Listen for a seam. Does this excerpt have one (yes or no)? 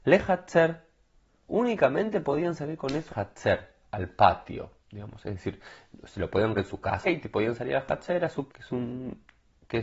yes